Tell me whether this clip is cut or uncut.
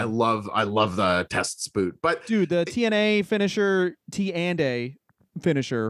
uncut